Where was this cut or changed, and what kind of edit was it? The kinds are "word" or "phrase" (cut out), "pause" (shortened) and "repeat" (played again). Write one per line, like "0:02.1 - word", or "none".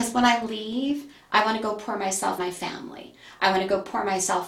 0:02.4 - word